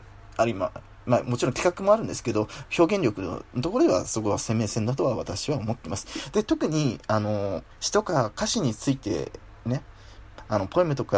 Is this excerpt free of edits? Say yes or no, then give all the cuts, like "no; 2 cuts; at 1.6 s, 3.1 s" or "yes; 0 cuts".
no; 1 cut; at 7.7 s